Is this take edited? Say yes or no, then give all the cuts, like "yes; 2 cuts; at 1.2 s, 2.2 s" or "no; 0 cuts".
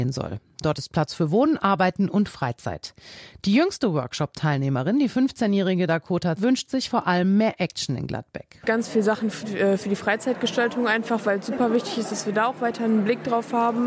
yes; 2 cuts; at 6.4 s, 9.3 s